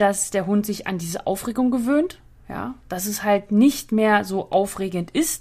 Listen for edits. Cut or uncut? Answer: uncut